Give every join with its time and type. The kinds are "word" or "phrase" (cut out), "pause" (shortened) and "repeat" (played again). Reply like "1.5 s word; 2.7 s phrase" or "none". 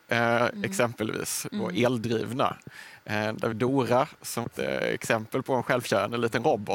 3.5 s word; 4.4 s word

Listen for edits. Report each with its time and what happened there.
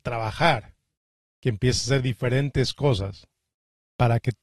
none

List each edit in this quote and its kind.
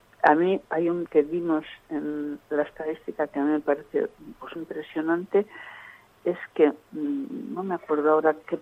1.1 s word; 4.6 s word

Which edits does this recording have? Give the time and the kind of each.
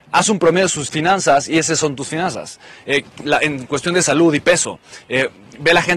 none

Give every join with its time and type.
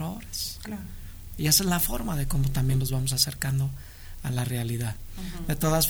none

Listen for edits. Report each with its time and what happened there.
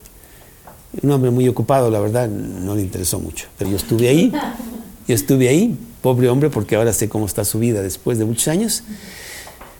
3.6 s word

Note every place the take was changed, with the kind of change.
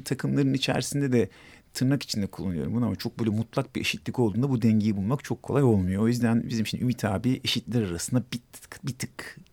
none

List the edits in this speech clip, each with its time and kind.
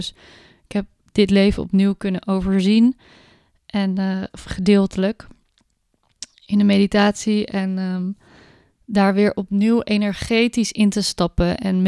none

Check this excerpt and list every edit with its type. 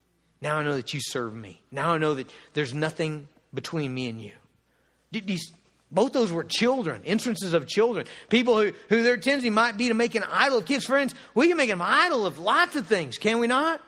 none

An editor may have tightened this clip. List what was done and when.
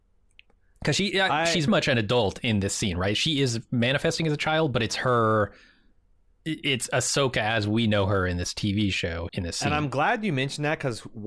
1.7 s word; 9.3 s word

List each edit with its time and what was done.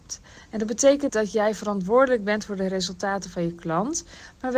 1.1 s word

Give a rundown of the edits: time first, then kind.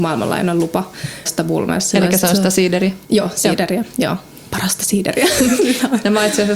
1.3 s word; 3.0 s pause

